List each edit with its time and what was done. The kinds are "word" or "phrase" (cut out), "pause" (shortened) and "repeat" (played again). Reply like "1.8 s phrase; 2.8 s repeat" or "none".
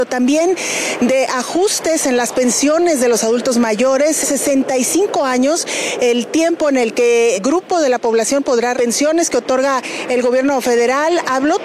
4.2 s word; 7.4 s word; 8.7 s phrase